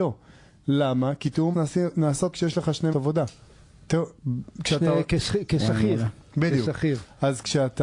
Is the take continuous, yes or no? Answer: no